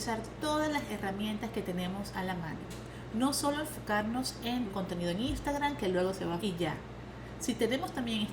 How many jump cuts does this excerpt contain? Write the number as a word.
two